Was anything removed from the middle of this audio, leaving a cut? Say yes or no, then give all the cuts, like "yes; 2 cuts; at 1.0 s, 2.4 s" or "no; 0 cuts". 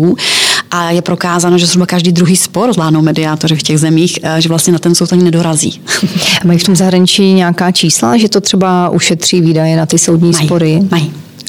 no; 0 cuts